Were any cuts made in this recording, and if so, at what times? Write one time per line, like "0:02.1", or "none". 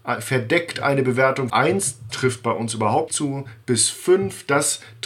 0:01.5
0:02.1
0:03.1